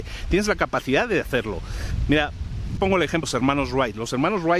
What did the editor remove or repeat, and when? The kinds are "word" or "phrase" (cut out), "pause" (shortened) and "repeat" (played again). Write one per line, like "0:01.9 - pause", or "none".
0:02.8 - word
0:03.2 - word